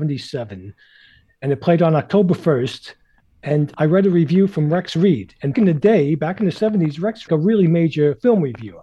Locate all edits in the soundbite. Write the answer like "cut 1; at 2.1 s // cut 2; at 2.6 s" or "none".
cut 1; at 3.7 s // cut 2; at 5.5 s // cut 3; at 7.3 s